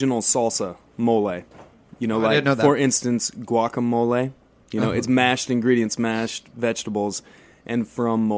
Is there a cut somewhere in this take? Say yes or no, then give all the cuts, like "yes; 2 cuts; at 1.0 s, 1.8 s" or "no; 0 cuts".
no; 0 cuts